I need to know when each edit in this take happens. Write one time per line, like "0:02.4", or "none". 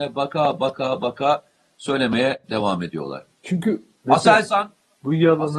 0:03.3